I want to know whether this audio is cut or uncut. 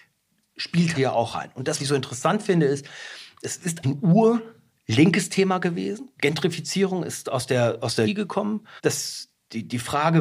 cut